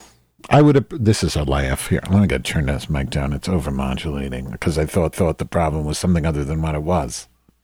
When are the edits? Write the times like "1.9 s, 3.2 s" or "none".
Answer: 5.1 s